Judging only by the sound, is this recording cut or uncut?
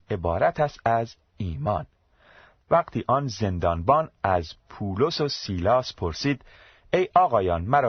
uncut